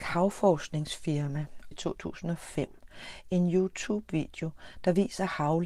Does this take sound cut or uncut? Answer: cut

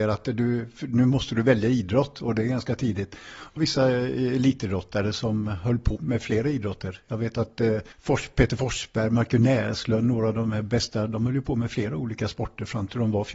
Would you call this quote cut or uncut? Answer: cut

